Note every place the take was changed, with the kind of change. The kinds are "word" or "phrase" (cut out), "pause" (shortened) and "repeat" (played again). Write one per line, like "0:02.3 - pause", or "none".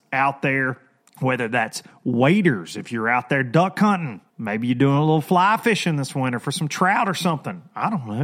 0:01.0 - pause
0:04.3 - pause